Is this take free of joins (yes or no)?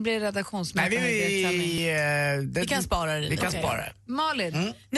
yes